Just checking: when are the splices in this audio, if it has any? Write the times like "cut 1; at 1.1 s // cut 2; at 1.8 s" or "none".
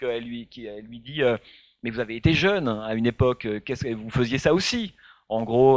none